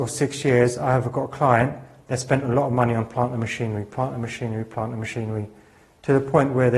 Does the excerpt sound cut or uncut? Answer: uncut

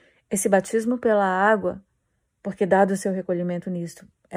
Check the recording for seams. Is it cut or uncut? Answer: uncut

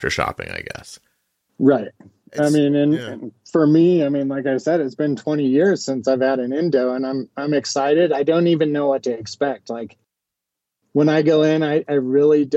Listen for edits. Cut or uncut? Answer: uncut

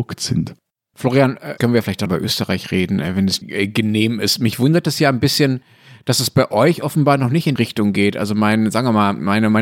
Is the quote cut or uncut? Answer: cut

